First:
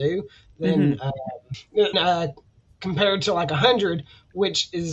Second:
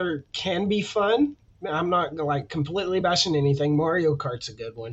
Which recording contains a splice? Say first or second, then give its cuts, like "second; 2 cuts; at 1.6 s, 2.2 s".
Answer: first; 1 cut; at 1.9 s